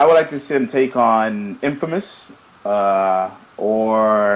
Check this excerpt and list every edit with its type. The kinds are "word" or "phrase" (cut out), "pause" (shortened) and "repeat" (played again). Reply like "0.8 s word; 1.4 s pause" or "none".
none